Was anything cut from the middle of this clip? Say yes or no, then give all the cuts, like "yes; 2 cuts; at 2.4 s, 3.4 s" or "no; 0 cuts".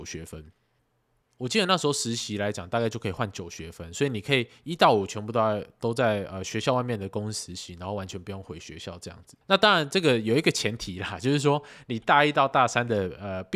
yes; 2 cuts; at 1.3 s, 9.4 s